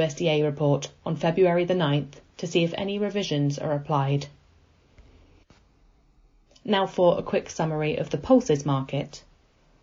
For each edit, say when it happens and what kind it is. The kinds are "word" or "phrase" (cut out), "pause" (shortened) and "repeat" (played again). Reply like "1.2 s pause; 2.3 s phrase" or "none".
none